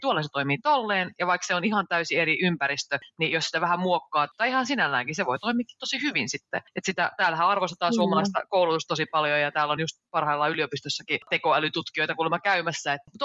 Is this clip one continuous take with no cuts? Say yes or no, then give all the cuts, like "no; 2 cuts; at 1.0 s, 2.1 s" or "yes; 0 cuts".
yes; 0 cuts